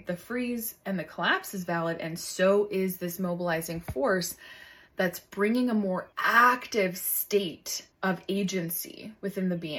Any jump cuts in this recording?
yes; 2 cuts; at 6.1 s, 7.9 s

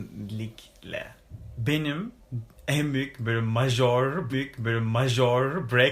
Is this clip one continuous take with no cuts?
no; 1 cut; at 4.3 s

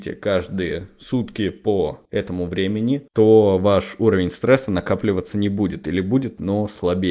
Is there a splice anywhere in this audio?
no; 0 cuts

